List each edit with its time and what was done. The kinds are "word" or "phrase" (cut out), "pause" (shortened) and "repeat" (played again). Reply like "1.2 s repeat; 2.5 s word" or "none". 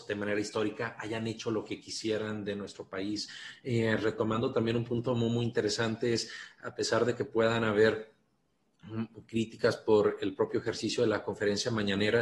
none